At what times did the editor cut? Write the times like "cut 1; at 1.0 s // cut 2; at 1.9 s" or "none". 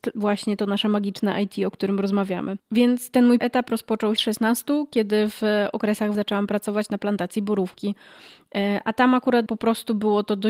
cut 1; at 2.6 s // cut 2; at 3.4 s // cut 3; at 4.2 s // cut 4; at 6.1 s // cut 5; at 9.5 s